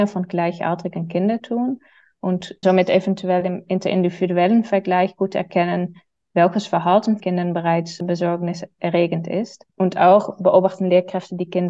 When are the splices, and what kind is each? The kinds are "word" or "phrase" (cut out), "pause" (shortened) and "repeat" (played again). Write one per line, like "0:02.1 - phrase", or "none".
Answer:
0:01.4 - word
0:02.6 - word
0:07.2 - word
0:08.0 - word
0:09.7 - pause